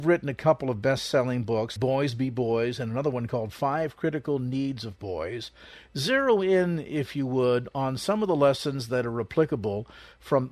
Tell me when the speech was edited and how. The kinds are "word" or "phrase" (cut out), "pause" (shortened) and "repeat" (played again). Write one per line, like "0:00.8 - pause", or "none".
0:01.8 - word